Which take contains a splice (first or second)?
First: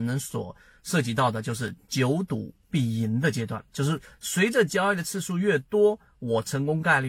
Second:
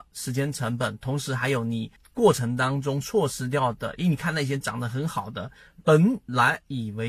second